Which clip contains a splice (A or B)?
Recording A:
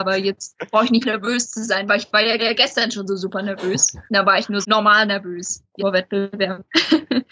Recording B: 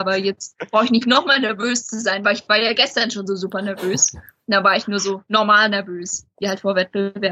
A